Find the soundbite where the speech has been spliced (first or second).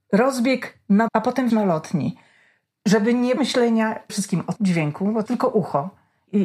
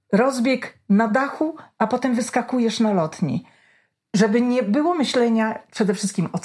first